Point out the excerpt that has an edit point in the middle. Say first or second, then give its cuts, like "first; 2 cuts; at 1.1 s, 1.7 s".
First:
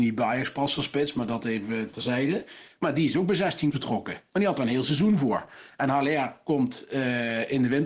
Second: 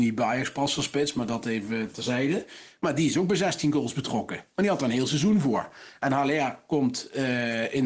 first; 1 cut; at 3.7 s